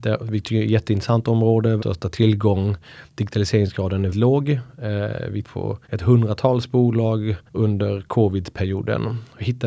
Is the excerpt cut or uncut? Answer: cut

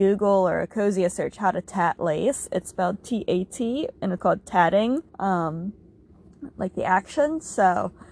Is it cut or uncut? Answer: cut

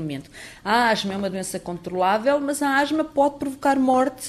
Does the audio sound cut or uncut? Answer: uncut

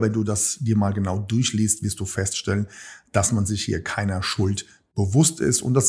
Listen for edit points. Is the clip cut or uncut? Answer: uncut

